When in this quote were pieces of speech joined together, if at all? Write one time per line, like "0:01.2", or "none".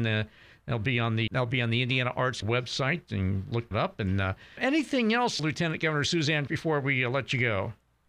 0:01.3
0:02.4
0:03.7
0:04.6
0:05.4
0:06.5